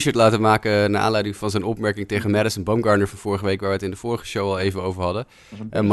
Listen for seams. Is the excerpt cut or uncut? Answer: uncut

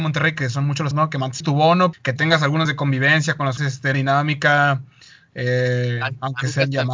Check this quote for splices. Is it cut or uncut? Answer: cut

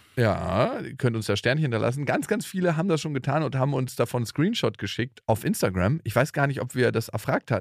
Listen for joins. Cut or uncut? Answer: uncut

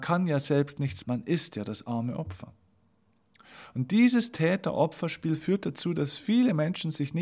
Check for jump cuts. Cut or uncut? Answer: cut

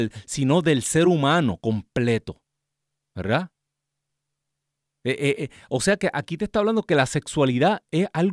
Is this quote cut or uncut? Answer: uncut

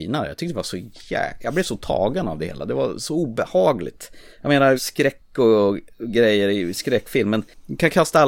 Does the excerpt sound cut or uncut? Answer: cut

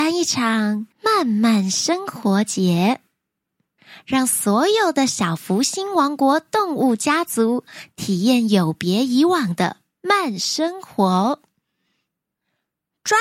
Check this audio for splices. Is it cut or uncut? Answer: cut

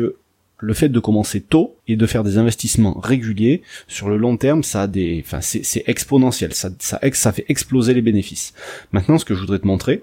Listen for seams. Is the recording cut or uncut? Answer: cut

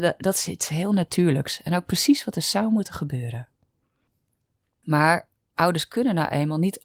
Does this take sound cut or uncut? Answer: uncut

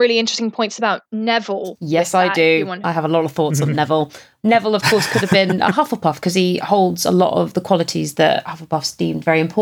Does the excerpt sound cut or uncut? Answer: uncut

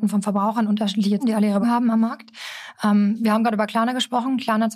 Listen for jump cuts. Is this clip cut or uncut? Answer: cut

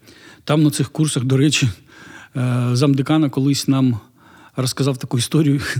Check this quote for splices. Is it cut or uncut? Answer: uncut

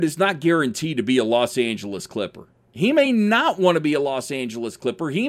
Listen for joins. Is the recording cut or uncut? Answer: uncut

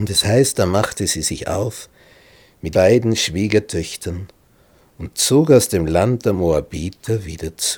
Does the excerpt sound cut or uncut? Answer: cut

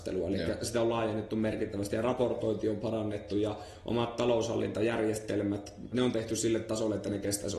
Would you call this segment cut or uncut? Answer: cut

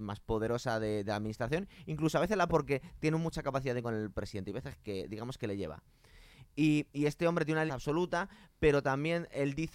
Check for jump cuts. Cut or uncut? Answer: cut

